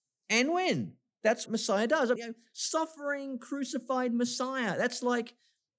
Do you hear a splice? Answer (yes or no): yes